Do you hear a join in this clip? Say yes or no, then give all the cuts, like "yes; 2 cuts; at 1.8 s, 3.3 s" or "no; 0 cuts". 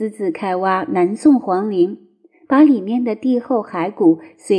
no; 0 cuts